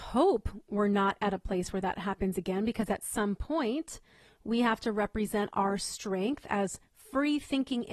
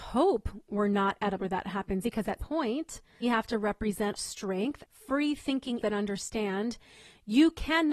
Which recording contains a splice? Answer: second; 7 cuts; at 1.4 s, 2.0 s, 2.4 s, 3.2 s, 4.2 s, 4.8 s, 5.8 s

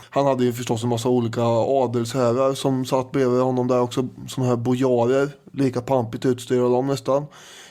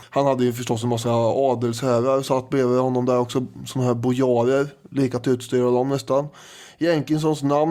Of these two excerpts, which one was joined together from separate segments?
second; 3 cuts; at 1.0 s, 2.2 s, 5.2 s

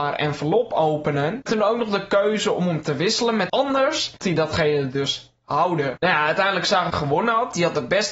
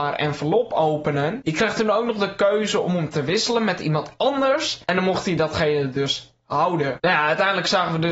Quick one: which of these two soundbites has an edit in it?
first; 4 cuts; at 1.5 s, 3.5 s, 4.2 s, 6.9 s

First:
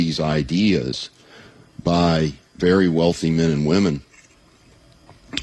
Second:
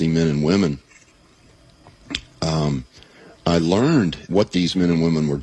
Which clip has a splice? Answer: second; 2 cuts; at 2.3 s, 4.3 s

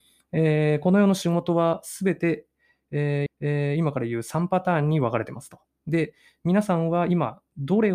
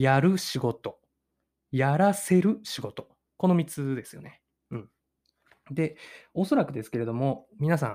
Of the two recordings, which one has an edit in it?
first; 1 cut; at 3.3 s

